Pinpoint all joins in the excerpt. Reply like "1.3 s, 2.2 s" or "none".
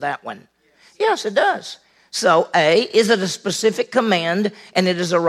none